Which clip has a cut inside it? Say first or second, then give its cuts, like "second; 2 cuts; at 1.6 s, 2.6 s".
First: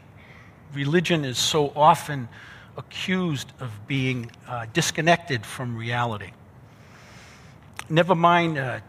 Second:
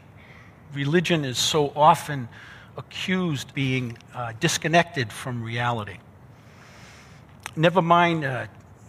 second; 1 cut; at 3.5 s